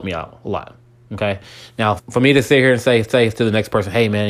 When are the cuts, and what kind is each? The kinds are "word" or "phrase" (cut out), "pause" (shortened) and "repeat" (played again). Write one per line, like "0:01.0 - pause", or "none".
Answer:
0:02.0 - word
0:03.1 - repeat